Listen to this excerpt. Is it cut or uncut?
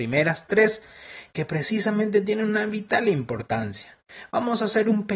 uncut